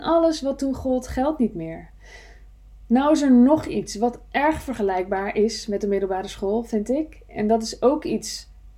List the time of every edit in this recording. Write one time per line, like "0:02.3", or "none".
none